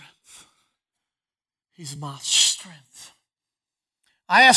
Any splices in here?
no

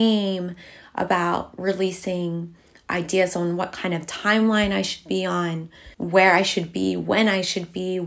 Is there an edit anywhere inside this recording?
yes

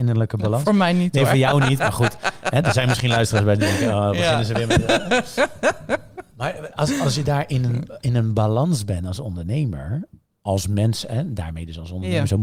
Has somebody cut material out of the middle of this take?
no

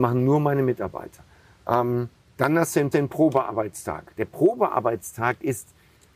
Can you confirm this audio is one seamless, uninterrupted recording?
no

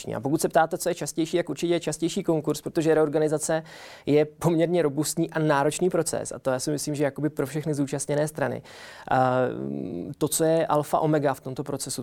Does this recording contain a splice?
no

